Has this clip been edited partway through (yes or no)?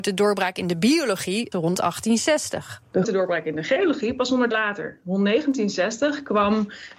yes